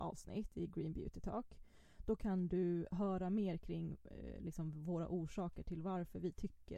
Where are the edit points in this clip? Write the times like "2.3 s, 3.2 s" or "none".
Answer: none